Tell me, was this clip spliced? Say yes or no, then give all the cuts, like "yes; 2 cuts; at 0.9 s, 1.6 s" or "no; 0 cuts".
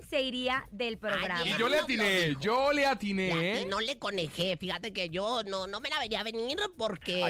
no; 0 cuts